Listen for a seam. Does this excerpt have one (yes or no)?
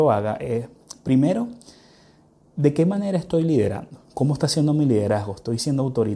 yes